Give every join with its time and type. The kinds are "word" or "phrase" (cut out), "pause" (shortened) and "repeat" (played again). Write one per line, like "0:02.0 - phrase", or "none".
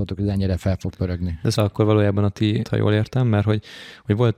0:01.6 - word
0:02.6 - word